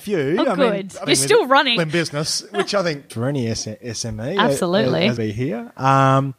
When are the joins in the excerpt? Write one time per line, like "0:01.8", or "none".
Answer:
0:01.1
0:01.8
0:03.1
0:05.2